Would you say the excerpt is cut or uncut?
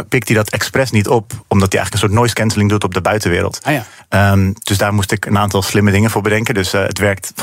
uncut